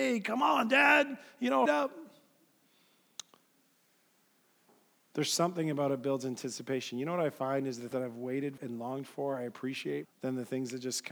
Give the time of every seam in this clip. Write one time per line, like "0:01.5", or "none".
0:01.7
0:07.9
0:08.6
0:10.0